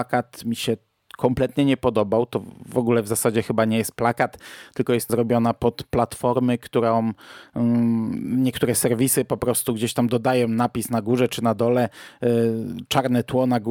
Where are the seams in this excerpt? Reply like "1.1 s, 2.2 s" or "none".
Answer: 5.1 s